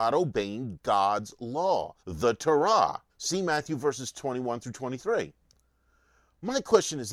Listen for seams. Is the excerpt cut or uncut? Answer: cut